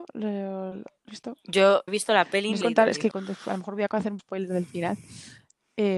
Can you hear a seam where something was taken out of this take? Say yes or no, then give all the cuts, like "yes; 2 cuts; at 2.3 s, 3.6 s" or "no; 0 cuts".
yes; 5 cuts; at 1.1 s, 1.9 s, 2.6 s, 3.1 s, 4.2 s